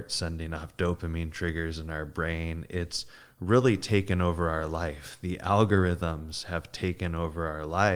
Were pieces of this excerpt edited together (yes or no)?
no